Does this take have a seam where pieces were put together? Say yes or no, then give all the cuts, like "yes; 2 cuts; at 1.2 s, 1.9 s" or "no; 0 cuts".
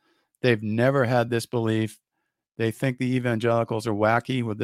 no; 0 cuts